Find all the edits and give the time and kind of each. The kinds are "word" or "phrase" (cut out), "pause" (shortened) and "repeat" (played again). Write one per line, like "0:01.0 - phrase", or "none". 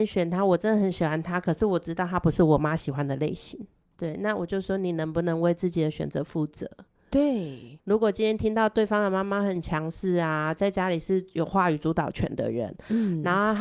none